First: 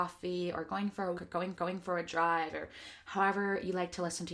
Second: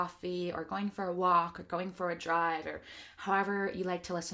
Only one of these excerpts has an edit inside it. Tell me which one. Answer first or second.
first